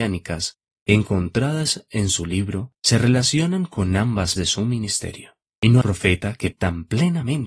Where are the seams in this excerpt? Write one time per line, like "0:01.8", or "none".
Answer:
0:02.8
0:04.4
0:05.5
0:05.8
0:06.5